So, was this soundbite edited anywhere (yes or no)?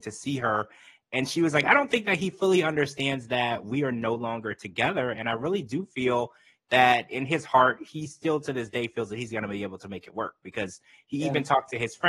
no